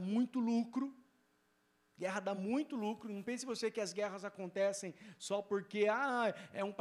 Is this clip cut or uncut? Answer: uncut